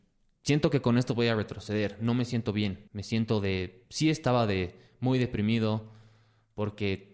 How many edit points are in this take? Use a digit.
1